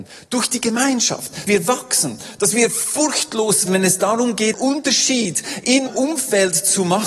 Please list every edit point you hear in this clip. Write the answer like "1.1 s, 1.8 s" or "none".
1.5 s, 3.7 s, 4.5 s, 5.9 s